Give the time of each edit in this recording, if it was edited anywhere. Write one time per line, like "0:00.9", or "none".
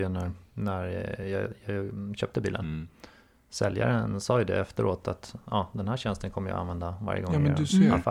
none